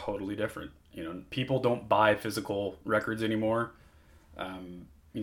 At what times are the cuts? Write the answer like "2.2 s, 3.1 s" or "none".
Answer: none